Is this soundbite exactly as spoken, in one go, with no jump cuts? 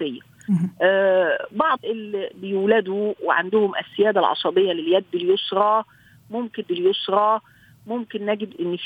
no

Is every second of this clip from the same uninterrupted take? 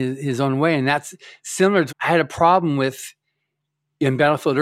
no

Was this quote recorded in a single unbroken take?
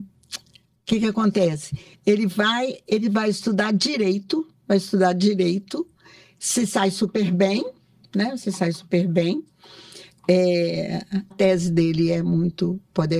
no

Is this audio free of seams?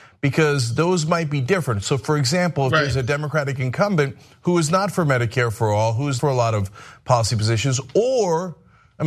no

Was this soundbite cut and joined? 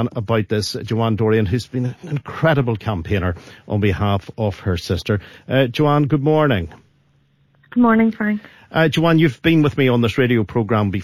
no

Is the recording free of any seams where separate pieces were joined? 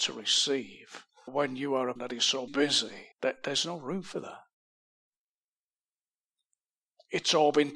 no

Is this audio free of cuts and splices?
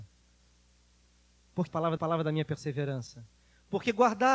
no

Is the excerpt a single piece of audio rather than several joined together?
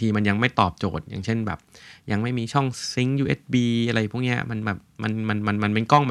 yes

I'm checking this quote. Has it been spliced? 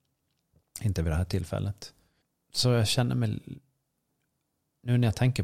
yes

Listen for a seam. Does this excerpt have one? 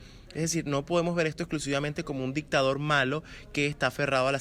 no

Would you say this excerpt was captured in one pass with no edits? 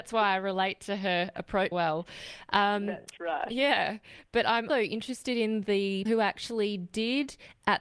no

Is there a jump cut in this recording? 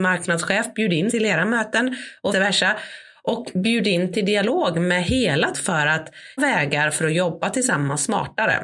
yes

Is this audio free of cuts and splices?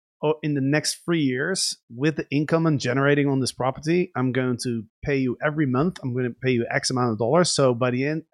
no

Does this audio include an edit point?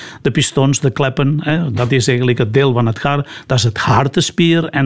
no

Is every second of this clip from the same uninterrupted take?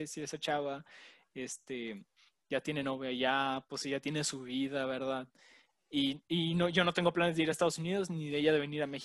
yes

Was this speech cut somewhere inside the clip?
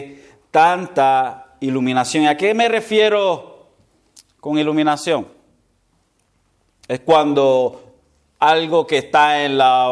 no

